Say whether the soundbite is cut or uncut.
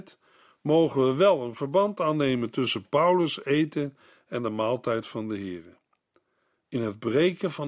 uncut